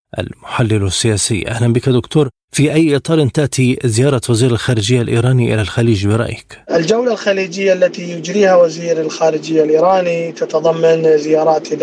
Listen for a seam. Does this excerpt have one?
no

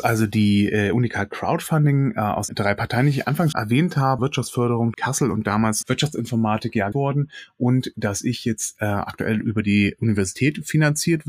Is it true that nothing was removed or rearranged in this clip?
no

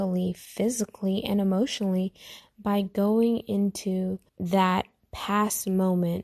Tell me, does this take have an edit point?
yes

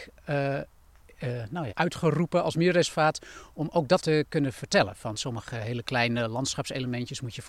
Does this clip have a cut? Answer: yes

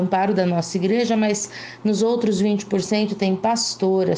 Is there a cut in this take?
no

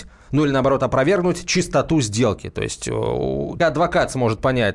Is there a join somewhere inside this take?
yes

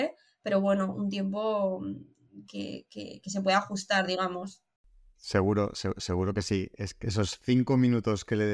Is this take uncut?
yes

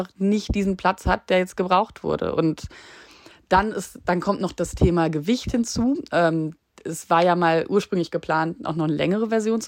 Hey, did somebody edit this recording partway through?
no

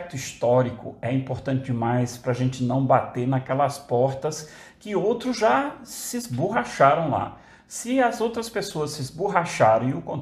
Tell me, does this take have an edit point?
no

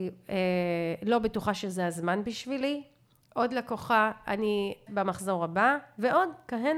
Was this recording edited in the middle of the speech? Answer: yes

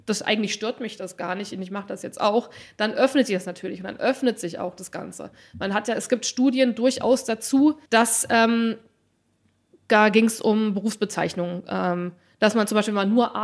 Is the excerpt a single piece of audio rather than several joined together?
no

